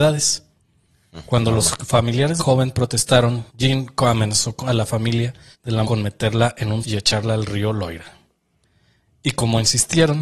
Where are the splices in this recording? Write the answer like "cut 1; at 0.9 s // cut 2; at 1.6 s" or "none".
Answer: cut 1; at 2.4 s // cut 2; at 3.5 s // cut 3; at 5.5 s // cut 4; at 5.8 s // cut 5; at 6.8 s